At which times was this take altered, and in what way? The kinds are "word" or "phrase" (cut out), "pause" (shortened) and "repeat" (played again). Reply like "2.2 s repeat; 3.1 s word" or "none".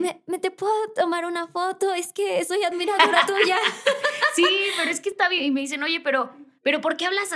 none